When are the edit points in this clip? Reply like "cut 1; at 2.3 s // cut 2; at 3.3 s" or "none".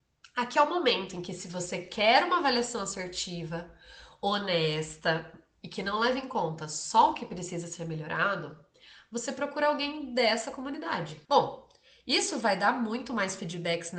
cut 1; at 11.2 s

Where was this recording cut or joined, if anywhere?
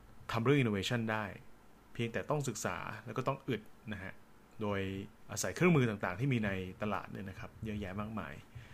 cut 1; at 5.2 s

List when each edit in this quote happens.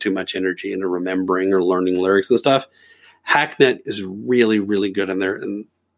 none

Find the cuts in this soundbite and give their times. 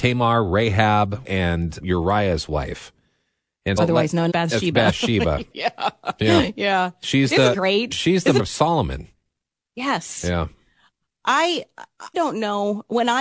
cut 1; at 1.2 s // cut 2; at 1.8 s // cut 3; at 3.8 s // cut 4; at 4.3 s // cut 5; at 5.5 s // cut 6; at 7.5 s // cut 7; at 8.4 s // cut 8; at 12.1 s

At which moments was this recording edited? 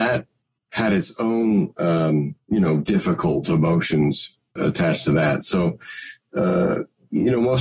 cut 1; at 2.4 s // cut 2; at 4.6 s

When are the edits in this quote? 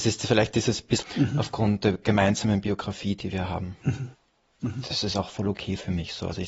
cut 1; at 1.0 s // cut 2; at 1.8 s

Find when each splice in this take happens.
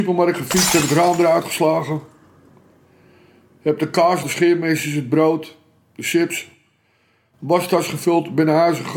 cut 1; at 4.2 s

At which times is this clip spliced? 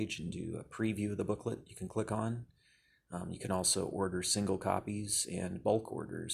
none

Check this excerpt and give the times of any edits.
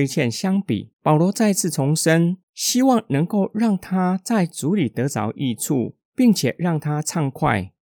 cut 1; at 0.9 s // cut 2; at 2.4 s

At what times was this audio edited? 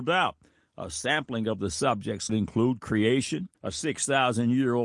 cut 1; at 2.3 s // cut 2; at 3.5 s

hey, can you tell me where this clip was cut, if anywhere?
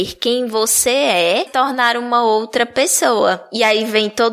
cut 1; at 1.5 s

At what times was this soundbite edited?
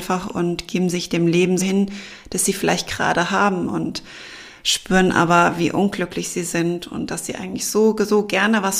cut 1; at 1.6 s

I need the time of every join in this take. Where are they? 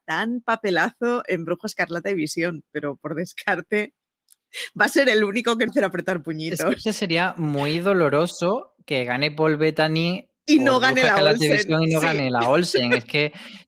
cut 1; at 5.7 s // cut 2; at 6.8 s

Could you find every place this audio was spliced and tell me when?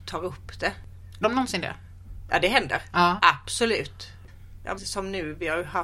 cut 1; at 1.2 s // cut 2; at 4.8 s

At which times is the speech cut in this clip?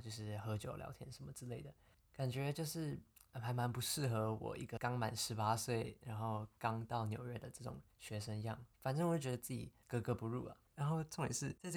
cut 1; at 7.9 s // cut 2; at 8.7 s

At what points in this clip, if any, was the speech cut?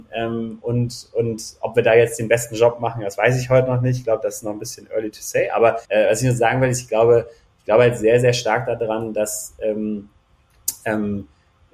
cut 1; at 5.8 s

